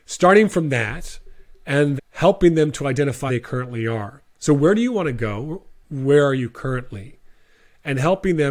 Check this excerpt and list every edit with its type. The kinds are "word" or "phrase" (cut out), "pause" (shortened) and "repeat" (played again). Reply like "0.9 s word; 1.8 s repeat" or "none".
2.0 s word; 3.3 s word; 5.8 s pause